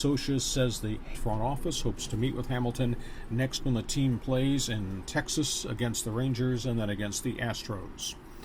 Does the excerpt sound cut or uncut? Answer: cut